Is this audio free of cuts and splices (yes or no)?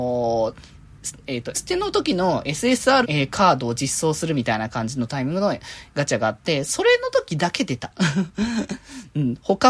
no